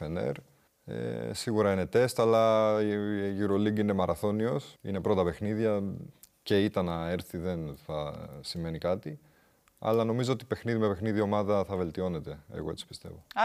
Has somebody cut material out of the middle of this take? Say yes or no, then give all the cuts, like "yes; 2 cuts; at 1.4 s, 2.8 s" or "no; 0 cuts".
yes; 1 cut; at 4.8 s